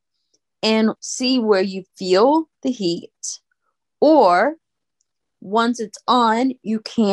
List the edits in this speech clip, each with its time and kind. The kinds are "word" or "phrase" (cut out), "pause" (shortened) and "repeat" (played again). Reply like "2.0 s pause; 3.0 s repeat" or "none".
1.0 s pause